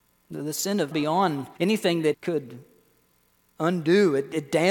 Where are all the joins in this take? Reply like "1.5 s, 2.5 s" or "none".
0.9 s, 1.6 s, 2.1 s